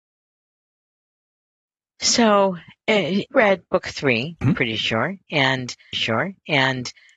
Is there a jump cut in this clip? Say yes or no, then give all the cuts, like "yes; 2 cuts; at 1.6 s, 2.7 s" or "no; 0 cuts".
yes; 3 cuts; at 3.3 s, 4.4 s, 5.9 s